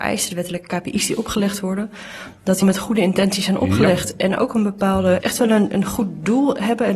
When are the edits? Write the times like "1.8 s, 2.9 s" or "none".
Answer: 2.6 s, 5.2 s

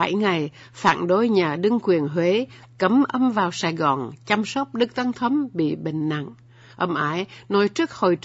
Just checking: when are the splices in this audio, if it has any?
none

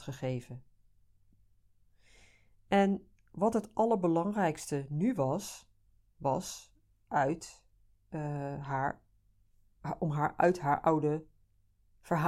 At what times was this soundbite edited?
none

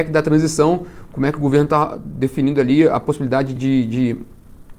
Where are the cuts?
3.6 s

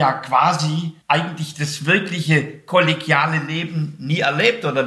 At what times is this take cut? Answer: 1.0 s

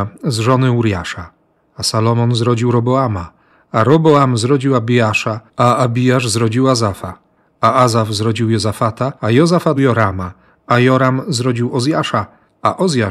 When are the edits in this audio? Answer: 5.5 s, 9.2 s, 9.8 s

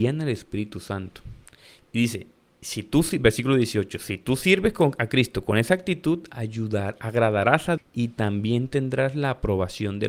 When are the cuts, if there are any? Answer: 7.8 s

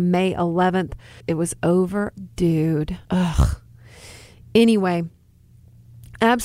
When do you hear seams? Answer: 1.2 s, 2.2 s, 3.0 s

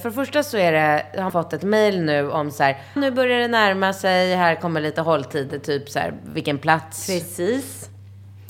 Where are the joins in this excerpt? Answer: 1.3 s, 3.0 s

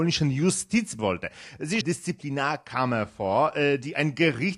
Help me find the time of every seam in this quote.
1.0 s, 1.8 s

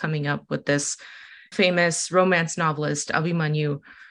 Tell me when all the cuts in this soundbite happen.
1.5 s

